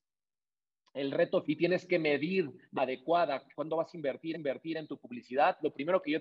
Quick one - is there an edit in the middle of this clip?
yes; 4 cuts; at 1.4 s, 2.8 s, 3.5 s, 4.3 s

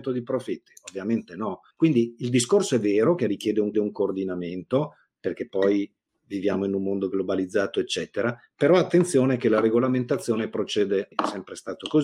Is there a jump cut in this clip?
yes; 3 cuts; at 1.7 s, 3.7 s, 11.1 s

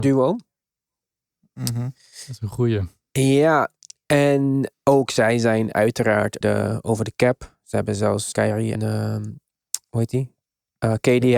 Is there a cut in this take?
yes; 4 cuts; at 4.7 s, 6.4 s, 8.3 s, 8.7 s

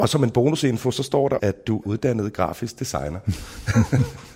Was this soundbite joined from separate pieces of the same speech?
yes; 2 cuts; at 1.4 s, 1.8 s

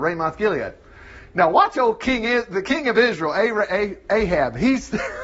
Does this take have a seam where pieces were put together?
no; 0 cuts

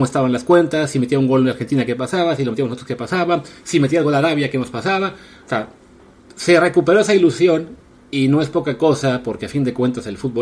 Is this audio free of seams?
yes; 0 cuts

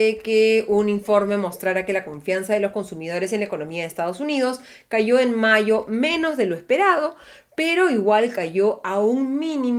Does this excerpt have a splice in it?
no; 0 cuts

